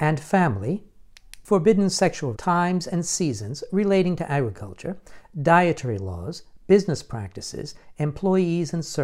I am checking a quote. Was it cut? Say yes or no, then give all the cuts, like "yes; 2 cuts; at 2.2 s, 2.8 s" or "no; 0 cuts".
yes; 1 cut; at 2.3 s